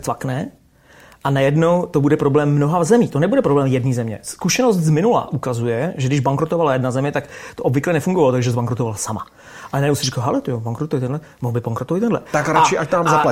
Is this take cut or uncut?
uncut